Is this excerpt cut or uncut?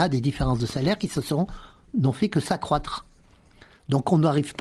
uncut